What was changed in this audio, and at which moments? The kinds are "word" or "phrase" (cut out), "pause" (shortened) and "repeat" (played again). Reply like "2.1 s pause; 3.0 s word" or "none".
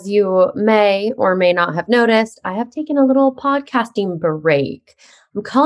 none